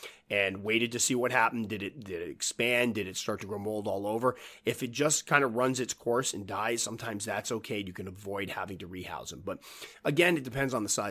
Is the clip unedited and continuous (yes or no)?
yes